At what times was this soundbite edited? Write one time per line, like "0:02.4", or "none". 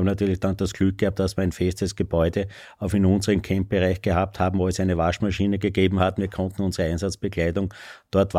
none